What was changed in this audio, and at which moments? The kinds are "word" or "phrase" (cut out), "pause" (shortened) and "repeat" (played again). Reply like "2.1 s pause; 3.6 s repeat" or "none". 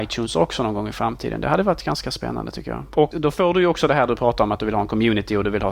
3.1 s word